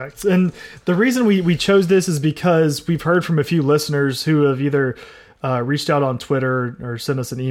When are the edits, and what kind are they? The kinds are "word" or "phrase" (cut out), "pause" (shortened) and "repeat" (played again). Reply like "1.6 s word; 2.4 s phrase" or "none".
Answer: none